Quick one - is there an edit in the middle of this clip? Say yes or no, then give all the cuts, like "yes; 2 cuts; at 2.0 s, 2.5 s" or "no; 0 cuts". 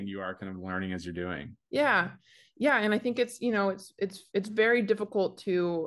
yes; 2 cuts; at 1.6 s, 4.3 s